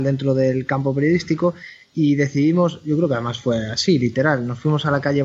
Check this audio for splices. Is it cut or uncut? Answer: uncut